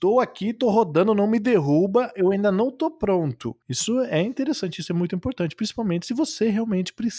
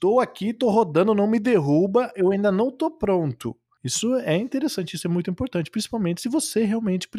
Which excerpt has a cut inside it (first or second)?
first